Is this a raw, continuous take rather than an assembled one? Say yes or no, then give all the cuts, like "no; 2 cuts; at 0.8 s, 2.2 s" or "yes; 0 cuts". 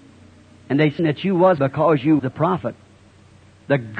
no; 3 cuts; at 1.0 s, 1.6 s, 2.2 s